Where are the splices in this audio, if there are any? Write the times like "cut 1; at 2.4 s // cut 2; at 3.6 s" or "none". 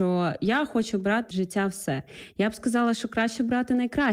cut 1; at 1.3 s

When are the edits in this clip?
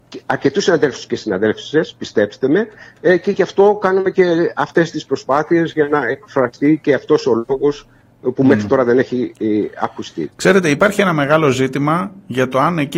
none

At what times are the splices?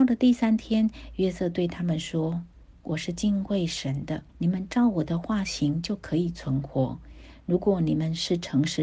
cut 1; at 4.3 s

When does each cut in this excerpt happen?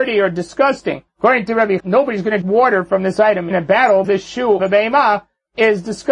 cut 1; at 1.8 s // cut 2; at 2.4 s // cut 3; at 3.5 s // cut 4; at 4.0 s // cut 5; at 4.6 s

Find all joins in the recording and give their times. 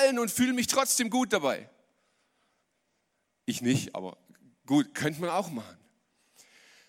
none

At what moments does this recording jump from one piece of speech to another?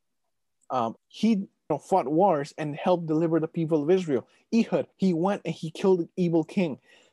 cut 1; at 1.0 s // cut 2; at 1.7 s // cut 3; at 4.9 s

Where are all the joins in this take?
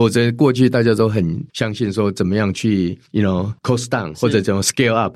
cut 1; at 1.5 s // cut 2; at 3.1 s // cut 3; at 3.6 s // cut 4; at 4.1 s

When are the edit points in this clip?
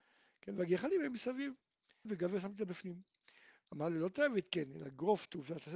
cut 1; at 2.0 s

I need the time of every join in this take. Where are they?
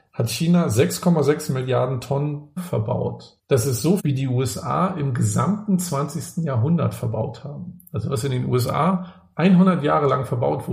cut 1; at 2.6 s // cut 2; at 3.4 s // cut 3; at 4.0 s

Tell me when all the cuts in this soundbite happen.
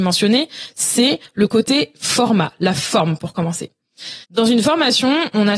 cut 1; at 4.2 s

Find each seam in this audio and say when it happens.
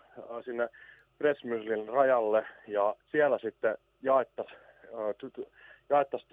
cut 1; at 3.0 s

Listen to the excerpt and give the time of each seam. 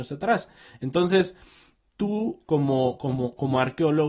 none

